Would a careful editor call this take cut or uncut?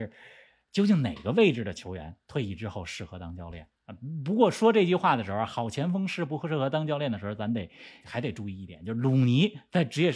cut